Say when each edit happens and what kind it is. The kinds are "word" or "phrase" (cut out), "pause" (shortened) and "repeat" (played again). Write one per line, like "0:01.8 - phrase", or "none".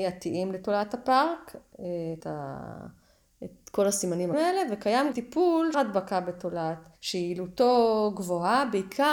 0:02.2 - phrase
0:04.3 - word
0:05.1 - word
0:05.7 - phrase
0:07.0 - pause